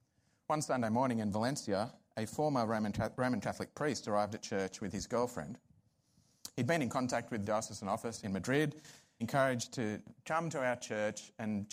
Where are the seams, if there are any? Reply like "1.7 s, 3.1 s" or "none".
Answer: 7.4 s, 8.2 s, 9.2 s